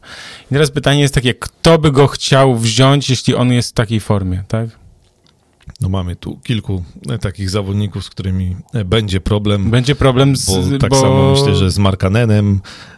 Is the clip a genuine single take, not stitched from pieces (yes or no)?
yes